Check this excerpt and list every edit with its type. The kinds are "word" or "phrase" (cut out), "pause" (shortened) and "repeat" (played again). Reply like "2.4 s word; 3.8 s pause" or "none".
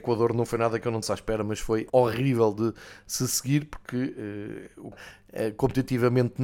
1.0 s word; 1.9 s word; 4.9 s word

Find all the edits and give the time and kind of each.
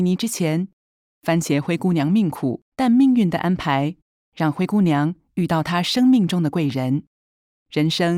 2.7 s pause

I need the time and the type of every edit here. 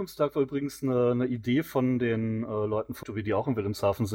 3.0 s word

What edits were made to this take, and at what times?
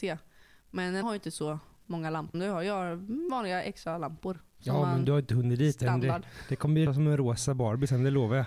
1.0 s word; 2.3 s word; 6.9 s word

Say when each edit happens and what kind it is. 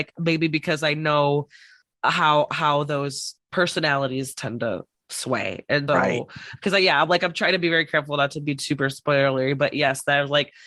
5.9 s word

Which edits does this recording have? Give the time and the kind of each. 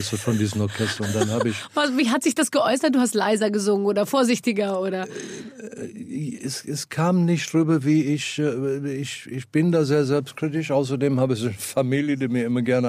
none

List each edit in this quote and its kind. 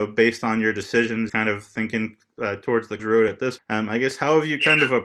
1.3 s word; 3.0 s word; 3.6 s word

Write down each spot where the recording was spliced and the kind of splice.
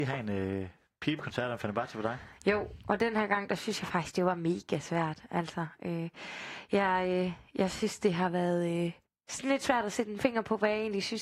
9.0 s pause

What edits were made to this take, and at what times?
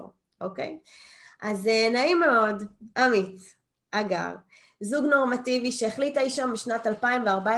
none

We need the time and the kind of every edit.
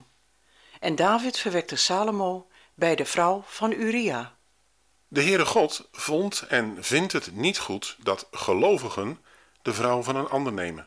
none

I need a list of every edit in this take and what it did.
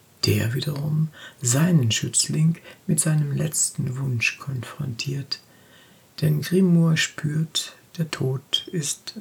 none

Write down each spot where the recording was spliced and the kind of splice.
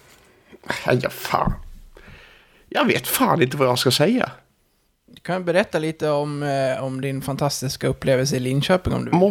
none

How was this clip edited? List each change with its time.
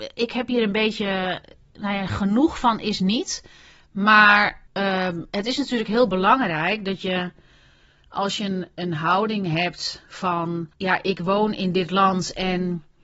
4.7 s pause; 8.7 s word; 10.7 s pause

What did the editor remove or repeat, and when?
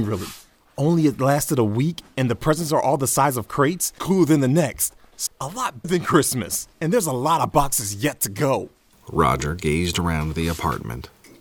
4.0 s phrase; 5.3 s word; 5.8 s word; 6.7 s pause

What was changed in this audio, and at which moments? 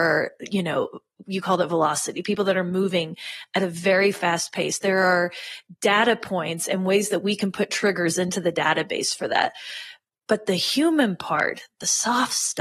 none

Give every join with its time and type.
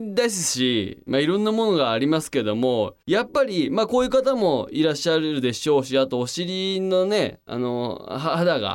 3.0 s pause

